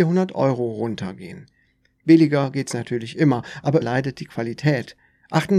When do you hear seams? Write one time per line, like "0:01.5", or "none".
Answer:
0:03.8